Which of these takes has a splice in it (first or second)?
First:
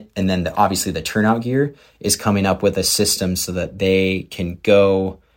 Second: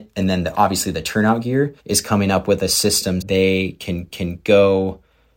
second